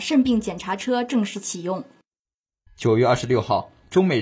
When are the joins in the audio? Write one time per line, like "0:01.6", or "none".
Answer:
none

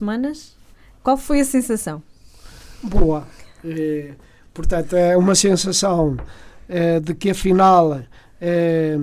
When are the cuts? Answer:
none

